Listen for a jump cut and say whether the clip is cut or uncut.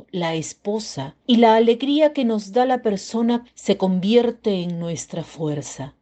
cut